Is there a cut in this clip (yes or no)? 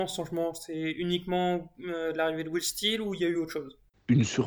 no